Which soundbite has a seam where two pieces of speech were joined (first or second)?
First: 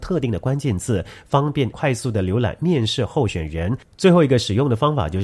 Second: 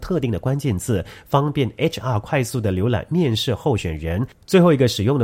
first